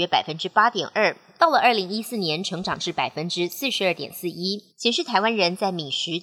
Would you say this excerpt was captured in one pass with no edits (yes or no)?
no